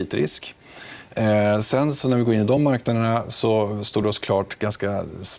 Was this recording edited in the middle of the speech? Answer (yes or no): no